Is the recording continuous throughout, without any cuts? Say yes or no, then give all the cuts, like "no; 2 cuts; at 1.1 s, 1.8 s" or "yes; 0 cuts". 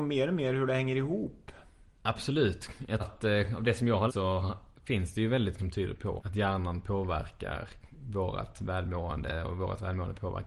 no; 4 cuts; at 3.0 s, 4.1 s, 5.6 s, 6.2 s